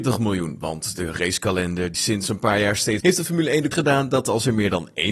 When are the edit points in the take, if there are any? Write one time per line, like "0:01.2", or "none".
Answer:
0:01.9
0:03.0
0:03.7